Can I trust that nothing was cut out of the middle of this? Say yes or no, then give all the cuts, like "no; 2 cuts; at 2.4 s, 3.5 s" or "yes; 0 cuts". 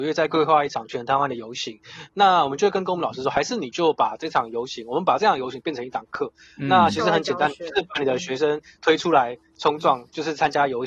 yes; 0 cuts